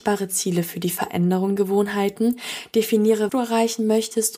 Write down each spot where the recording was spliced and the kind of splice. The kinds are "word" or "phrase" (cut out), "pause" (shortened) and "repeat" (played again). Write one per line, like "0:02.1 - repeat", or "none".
0:01.6 - word
0:03.3 - word

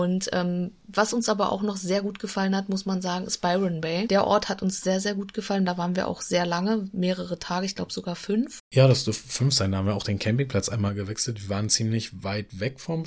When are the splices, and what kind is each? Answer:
none

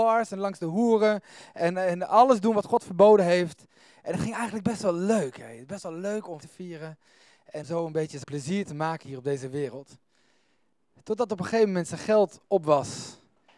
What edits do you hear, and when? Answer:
0:06.4 - word
0:07.6 - word
0:08.2 - word

